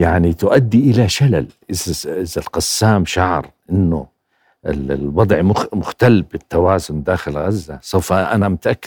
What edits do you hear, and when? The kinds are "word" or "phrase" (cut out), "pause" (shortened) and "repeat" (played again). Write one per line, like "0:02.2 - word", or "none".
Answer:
none